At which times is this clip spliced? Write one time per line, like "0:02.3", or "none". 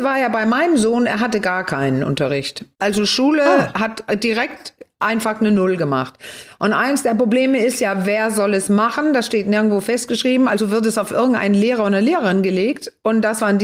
0:02.7